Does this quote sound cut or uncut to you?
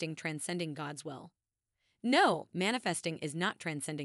uncut